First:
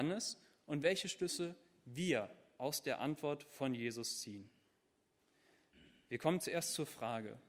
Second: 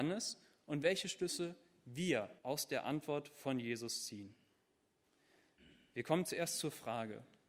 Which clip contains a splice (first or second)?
second